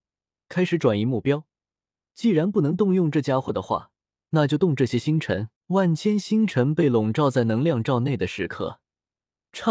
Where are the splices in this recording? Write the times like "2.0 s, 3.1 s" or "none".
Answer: 5.6 s